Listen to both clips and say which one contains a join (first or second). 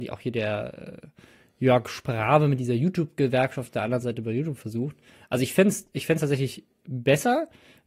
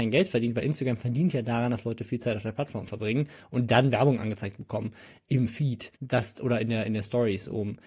second